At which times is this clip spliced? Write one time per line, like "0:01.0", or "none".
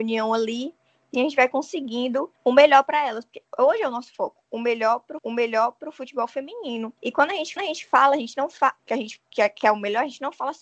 0:01.1
0:02.4
0:05.2
0:07.0
0:07.6
0:08.8